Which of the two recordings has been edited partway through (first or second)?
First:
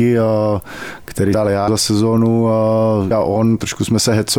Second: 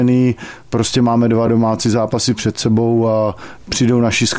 first